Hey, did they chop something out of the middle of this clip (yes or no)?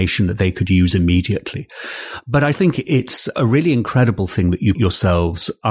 yes